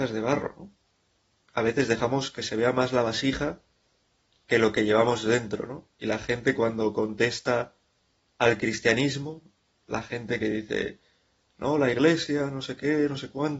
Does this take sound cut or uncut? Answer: uncut